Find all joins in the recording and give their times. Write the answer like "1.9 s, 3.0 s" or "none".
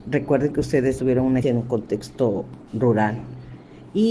1.0 s, 1.4 s, 2.7 s